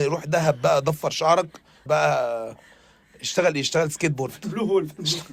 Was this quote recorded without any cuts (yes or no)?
no